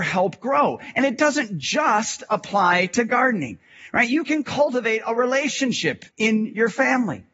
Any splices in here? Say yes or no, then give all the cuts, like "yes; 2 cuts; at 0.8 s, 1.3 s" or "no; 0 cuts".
yes; 1 cut; at 6.1 s